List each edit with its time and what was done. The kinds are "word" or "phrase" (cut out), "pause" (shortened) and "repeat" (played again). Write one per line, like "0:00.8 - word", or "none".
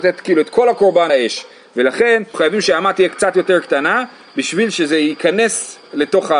0:01.1 - word
0:02.3 - word